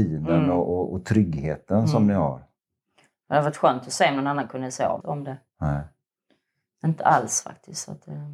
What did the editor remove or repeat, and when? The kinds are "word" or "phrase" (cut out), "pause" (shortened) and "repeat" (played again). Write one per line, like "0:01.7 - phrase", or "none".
0:05.0 - phrase